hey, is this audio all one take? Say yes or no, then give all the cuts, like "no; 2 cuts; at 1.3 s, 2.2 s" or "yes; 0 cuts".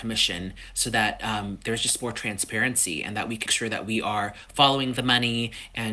no; 1 cut; at 3.5 s